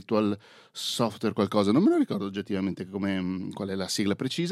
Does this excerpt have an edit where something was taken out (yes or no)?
no